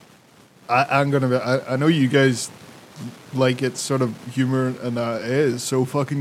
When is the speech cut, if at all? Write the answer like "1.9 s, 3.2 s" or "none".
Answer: none